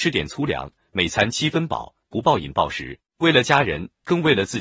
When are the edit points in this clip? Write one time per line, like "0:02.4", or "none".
0:03.1